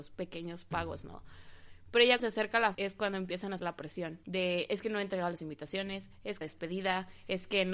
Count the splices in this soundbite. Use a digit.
5